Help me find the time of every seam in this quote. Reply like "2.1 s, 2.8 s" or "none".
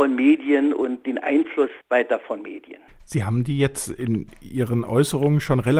1.8 s, 2.9 s